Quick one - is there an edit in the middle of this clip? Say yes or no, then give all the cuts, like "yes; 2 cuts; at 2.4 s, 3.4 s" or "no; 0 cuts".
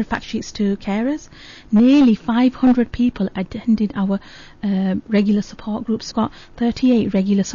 yes; 1 cut; at 6.1 s